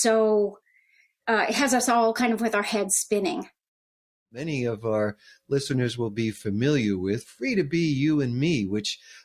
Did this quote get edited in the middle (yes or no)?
no